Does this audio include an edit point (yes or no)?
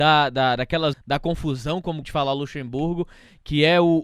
yes